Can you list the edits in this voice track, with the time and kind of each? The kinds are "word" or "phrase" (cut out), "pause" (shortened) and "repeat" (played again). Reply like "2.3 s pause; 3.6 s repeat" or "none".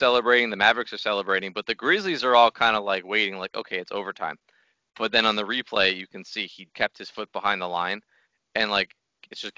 6.7 s word